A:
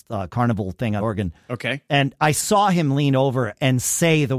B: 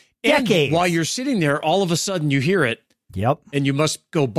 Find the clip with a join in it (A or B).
A